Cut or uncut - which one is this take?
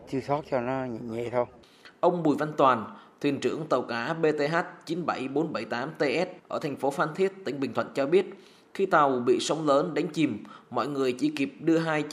cut